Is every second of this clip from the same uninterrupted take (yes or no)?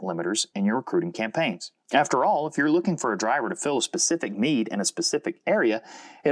no